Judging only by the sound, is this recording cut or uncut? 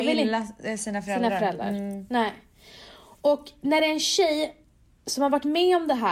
uncut